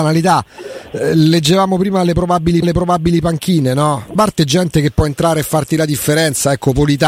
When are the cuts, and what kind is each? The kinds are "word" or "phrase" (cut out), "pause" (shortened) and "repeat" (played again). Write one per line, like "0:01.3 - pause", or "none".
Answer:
0:02.6 - repeat
0:04.2 - word